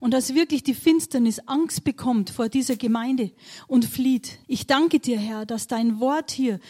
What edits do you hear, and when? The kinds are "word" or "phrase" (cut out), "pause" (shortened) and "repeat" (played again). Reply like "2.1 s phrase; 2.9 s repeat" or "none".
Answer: 4.4 s pause